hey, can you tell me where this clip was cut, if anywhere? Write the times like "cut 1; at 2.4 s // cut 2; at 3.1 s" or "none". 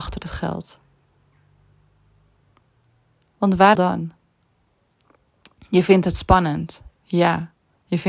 cut 1; at 3.7 s